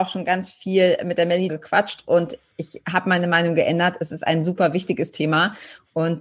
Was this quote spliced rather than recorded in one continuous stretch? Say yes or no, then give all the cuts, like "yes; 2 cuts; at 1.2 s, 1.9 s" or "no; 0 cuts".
yes; 1 cut; at 1.5 s